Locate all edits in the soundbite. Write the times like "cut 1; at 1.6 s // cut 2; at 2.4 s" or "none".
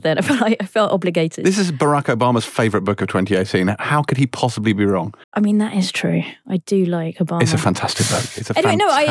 cut 1; at 5.2 s